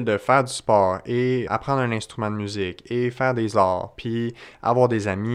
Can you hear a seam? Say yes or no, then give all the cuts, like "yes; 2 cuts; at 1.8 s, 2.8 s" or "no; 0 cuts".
yes; 1 cut; at 1.5 s